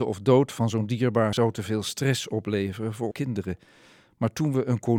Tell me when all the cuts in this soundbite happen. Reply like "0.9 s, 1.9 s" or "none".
1.3 s, 3.1 s